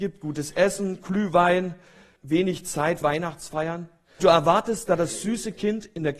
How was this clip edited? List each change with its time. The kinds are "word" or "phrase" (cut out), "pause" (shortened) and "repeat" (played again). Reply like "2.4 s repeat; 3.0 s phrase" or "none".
2.2 s word; 3.0 s word; 4.2 s word; 4.9 s word